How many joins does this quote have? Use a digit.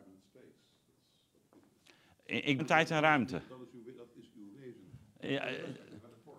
2